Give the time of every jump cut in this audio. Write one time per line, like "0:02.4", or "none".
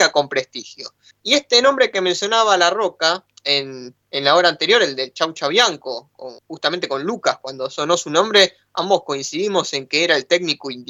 0:01.1
0:06.4